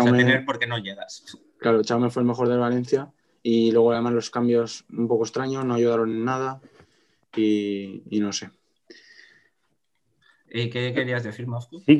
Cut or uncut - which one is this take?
uncut